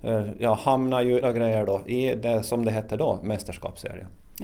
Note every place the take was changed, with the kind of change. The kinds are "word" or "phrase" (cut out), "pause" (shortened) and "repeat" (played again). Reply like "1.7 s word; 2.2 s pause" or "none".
1.2 s phrase